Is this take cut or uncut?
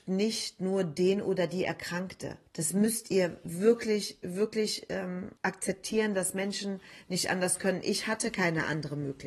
cut